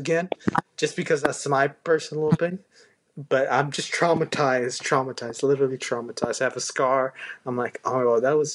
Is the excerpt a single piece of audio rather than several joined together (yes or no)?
yes